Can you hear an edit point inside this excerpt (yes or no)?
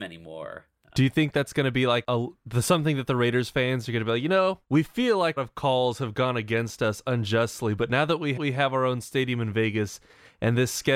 yes